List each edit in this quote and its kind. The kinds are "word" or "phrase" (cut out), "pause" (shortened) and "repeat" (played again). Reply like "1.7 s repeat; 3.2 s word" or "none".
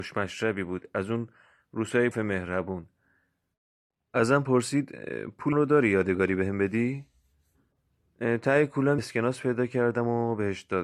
2.1 s word; 5.5 s word; 9.0 s word